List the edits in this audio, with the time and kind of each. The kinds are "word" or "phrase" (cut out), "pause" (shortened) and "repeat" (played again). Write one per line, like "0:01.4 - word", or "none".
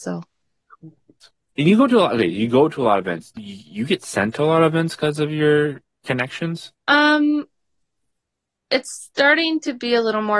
0:03.4 - word